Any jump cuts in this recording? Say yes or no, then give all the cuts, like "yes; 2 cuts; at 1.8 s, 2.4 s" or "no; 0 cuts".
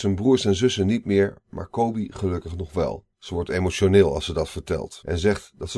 yes; 1 cut; at 3.1 s